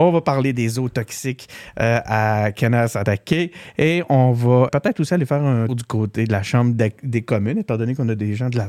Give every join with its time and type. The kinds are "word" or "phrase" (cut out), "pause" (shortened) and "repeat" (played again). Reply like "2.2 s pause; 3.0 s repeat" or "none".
4.7 s word; 5.7 s word

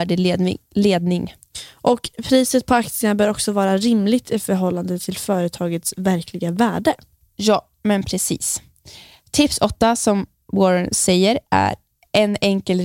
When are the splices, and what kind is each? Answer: none

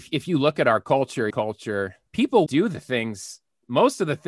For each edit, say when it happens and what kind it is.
1.3 s phrase; 2.5 s word

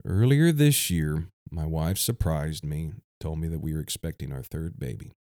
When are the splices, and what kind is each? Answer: 1.4 s pause

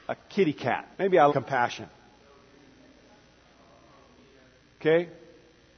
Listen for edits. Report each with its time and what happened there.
0.9 s pause; 1.3 s word

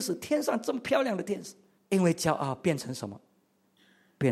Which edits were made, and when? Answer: 1.8 s pause

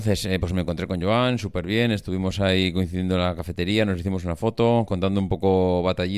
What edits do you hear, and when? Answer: none

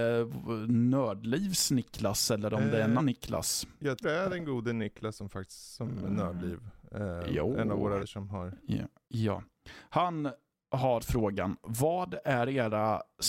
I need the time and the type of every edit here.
3.0 s word; 4.0 s word; 8.0 s word; 11.0 s word

